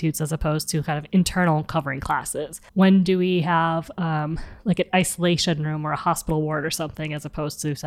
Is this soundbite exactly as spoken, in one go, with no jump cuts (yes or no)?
no